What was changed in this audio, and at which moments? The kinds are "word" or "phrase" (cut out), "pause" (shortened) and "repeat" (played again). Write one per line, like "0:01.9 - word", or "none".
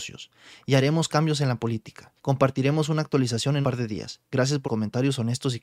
0:02.2 - pause
0:03.6 - word
0:04.6 - word